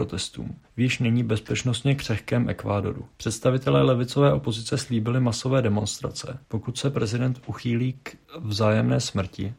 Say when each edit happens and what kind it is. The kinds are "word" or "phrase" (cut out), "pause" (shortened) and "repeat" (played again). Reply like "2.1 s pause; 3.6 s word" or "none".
3.1 s pause; 6.4 s pause